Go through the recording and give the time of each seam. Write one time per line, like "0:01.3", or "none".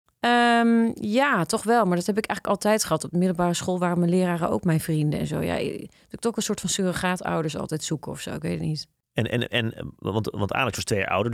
none